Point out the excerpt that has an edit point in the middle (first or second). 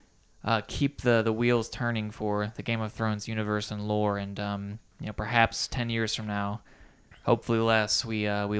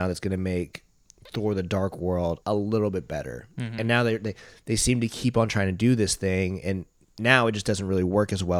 second